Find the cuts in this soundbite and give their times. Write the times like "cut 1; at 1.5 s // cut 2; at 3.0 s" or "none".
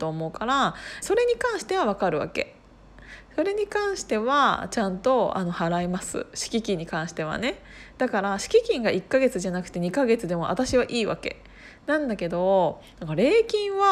cut 1; at 1.0 s